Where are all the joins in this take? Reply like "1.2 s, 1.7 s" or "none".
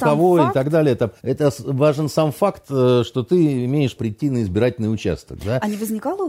1.2 s, 4.0 s